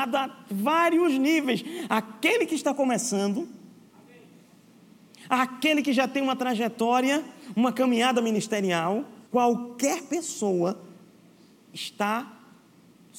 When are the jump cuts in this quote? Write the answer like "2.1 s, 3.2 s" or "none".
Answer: 9.3 s

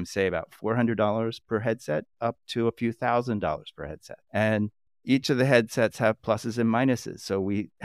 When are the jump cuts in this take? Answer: 2.1 s, 4.2 s

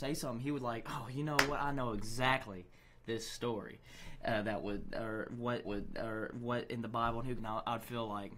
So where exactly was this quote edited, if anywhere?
5.6 s, 7.4 s

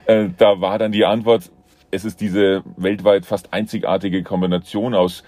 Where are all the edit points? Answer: none

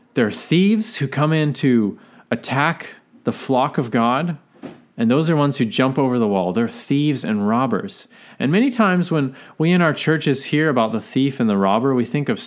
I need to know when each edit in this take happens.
none

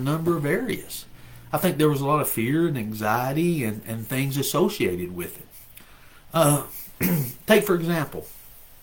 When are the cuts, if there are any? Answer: 7.0 s

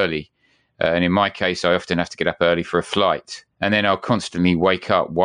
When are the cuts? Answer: 3.5 s

